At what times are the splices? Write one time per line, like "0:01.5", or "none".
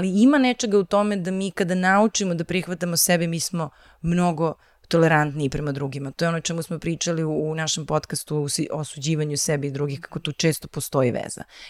none

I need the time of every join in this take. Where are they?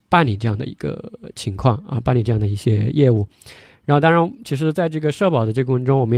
none

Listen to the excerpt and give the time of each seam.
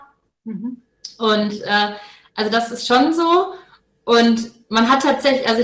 none

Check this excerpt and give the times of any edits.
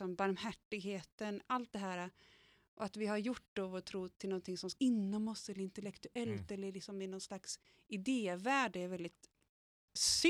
0:04.8

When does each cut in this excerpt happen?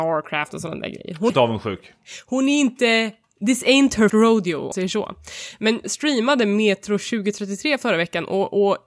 0:01.3
0:04.1
0:04.7
0:05.8

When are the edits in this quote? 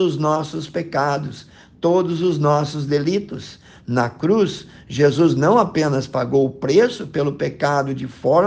none

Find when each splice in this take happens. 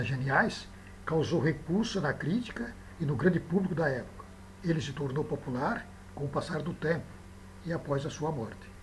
none

